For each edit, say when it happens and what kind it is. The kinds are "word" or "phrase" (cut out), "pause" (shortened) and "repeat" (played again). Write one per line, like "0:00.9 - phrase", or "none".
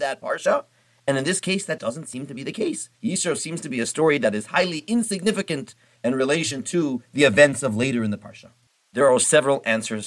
0:01.8 - word
0:02.9 - pause